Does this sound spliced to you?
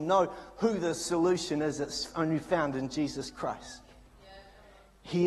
no; 0 cuts

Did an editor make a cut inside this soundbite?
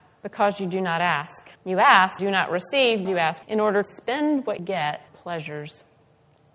yes; 7 cuts; at 1.6 s, 2.2 s, 3.0 s, 3.4 s, 3.8 s, 4.6 s, 5.1 s

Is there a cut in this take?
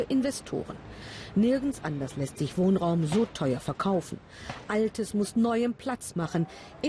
no; 0 cuts

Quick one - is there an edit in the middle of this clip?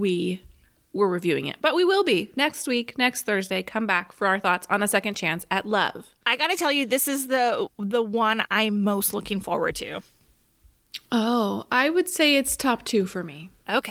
no; 0 cuts

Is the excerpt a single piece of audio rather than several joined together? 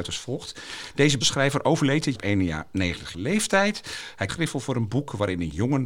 no; 4 cuts; at 1.2 s, 2.1 s, 3.1 s, 4.3 s

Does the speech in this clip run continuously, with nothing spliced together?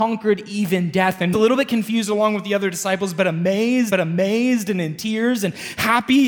no; 2 cuts; at 1.3 s, 3.9 s

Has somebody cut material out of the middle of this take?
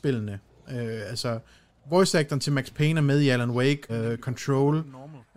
yes; 1 cut; at 3.9 s

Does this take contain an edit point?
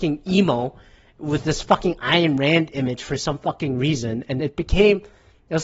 yes; 1 cut; at 4.4 s

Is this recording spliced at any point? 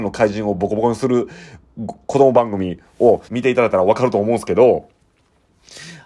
yes; 1 cut; at 3.2 s

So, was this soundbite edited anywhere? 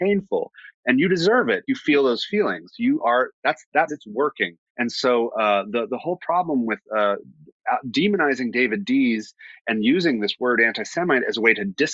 yes; 3 cuts; at 1.7 s, 3.9 s, 4.7 s

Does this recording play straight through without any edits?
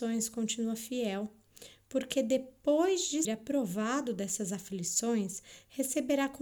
no; 1 cut; at 3.2 s

